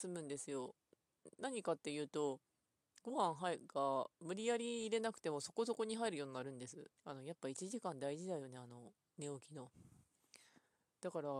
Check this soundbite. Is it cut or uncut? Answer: cut